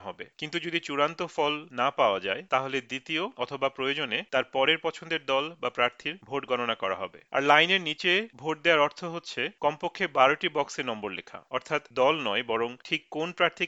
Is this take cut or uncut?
uncut